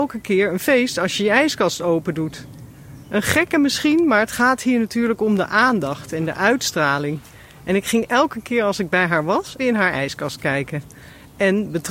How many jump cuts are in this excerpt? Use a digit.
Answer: 1